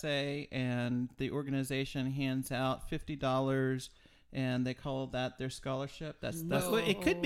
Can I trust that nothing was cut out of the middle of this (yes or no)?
yes